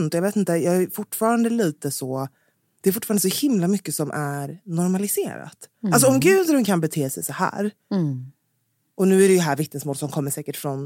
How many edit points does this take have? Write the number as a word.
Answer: zero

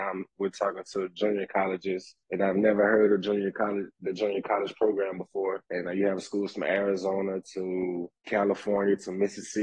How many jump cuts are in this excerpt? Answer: three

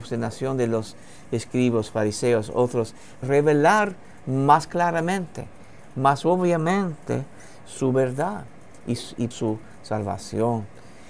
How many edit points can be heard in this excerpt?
two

